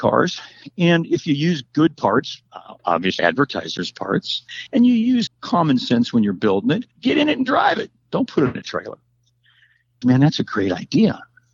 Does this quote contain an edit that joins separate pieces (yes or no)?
yes